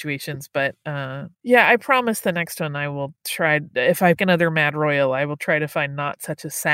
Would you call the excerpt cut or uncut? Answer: cut